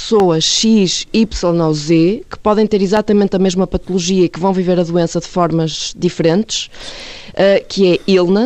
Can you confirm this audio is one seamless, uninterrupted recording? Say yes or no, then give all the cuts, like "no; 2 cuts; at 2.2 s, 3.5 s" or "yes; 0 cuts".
yes; 0 cuts